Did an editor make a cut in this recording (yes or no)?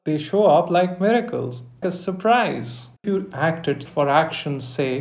yes